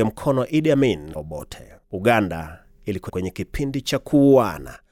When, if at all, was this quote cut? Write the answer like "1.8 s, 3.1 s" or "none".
1.1 s, 1.8 s, 3.1 s